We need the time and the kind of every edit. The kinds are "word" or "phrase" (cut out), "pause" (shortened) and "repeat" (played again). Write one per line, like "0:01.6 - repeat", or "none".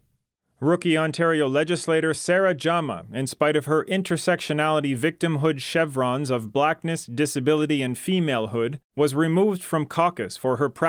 none